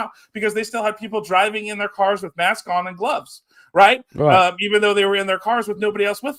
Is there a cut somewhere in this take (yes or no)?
no